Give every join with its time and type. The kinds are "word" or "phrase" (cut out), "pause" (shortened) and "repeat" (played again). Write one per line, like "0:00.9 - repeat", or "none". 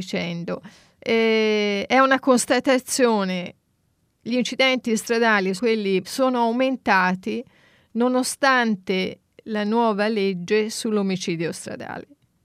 0:05.6 - word
0:06.0 - word